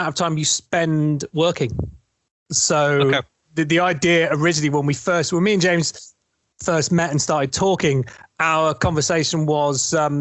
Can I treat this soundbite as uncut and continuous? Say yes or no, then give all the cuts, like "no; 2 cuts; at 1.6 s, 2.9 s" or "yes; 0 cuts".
yes; 0 cuts